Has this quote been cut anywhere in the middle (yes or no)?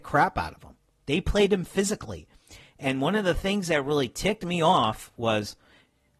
no